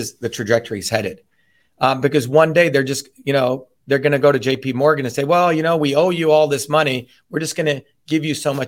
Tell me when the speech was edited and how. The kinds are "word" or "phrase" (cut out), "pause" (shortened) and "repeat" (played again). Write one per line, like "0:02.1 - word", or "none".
none